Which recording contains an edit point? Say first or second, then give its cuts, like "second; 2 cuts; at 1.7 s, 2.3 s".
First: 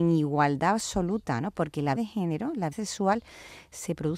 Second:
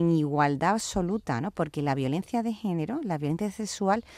first; 2 cuts; at 2.0 s, 2.7 s